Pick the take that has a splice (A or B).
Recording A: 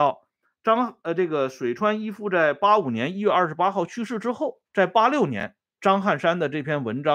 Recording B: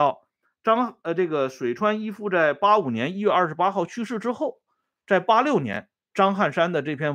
A